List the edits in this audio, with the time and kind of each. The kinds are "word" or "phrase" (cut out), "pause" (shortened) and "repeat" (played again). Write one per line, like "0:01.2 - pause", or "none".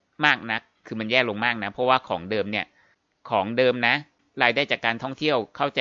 none